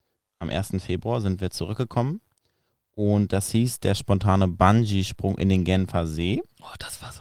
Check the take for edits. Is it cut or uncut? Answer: uncut